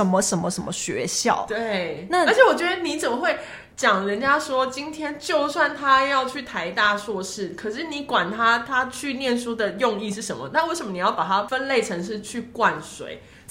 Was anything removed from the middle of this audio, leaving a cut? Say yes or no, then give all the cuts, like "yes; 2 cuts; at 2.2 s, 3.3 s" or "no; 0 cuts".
yes; 1 cut; at 3.7 s